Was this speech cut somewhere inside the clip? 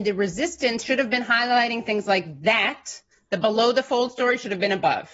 no; 0 cuts

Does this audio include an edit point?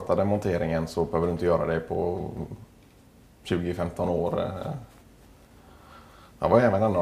no; 0 cuts

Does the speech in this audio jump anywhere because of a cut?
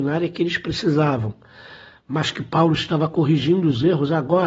no; 0 cuts

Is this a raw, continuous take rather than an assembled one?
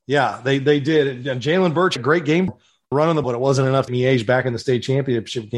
no; 5 cuts; at 2.0 s, 2.5 s, 2.9 s, 3.2 s, 3.9 s

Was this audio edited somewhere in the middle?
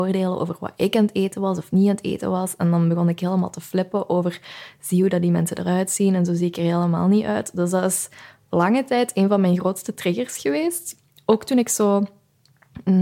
no; 0 cuts

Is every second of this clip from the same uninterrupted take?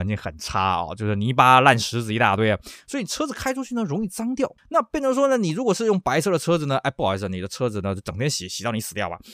no; 1 cut; at 4.6 s

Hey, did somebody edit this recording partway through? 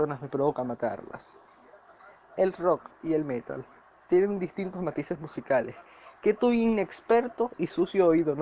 no; 0 cuts

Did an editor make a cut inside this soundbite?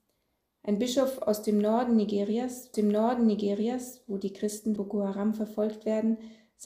yes; 2 cuts; at 2.7 s, 4.8 s

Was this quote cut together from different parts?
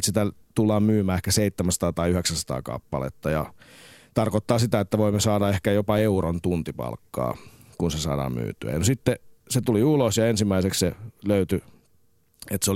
no; 0 cuts

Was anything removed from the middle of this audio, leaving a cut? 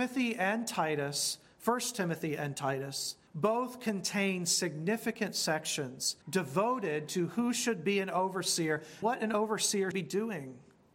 yes; 4 cuts; at 3.3 s, 6.2 s, 9.0 s, 9.9 s

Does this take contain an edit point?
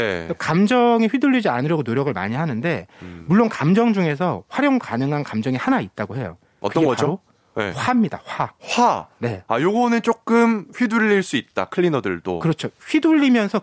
no; 0 cuts

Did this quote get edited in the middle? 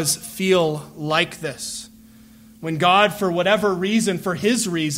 no; 0 cuts

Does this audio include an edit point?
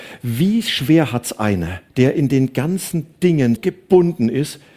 yes; 2 cuts; at 1.9 s, 3.6 s

